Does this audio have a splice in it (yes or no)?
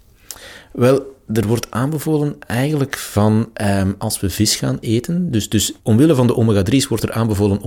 yes